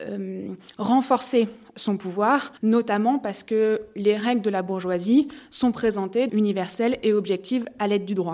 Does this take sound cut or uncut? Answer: cut